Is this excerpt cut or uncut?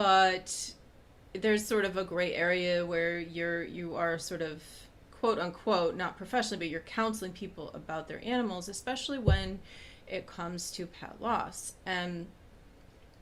uncut